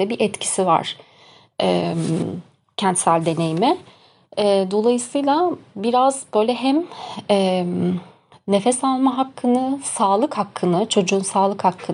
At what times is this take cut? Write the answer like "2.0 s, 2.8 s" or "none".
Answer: none